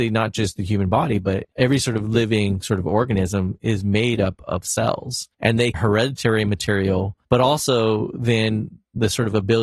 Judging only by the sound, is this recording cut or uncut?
cut